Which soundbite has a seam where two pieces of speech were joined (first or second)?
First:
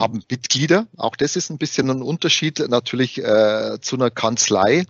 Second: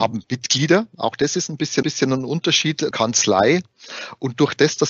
second